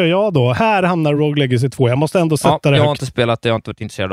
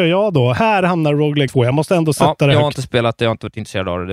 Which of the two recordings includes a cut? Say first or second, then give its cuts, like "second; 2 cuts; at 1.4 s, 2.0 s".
second; 1 cut; at 1.5 s